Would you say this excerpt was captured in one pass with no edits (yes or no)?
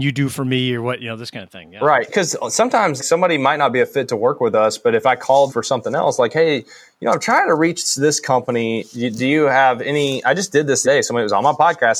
no